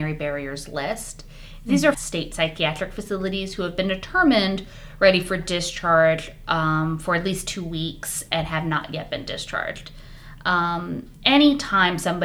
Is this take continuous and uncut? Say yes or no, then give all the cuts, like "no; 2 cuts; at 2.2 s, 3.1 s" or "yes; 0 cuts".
no; 1 cut; at 1.9 s